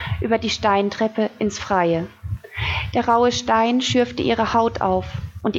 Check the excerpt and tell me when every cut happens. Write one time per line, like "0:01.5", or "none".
none